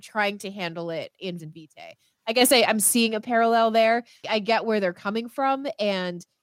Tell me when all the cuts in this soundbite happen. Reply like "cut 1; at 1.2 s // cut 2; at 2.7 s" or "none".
cut 1; at 1.4 s